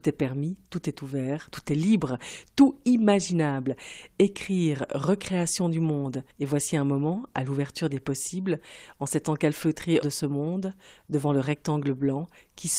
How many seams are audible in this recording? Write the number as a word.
two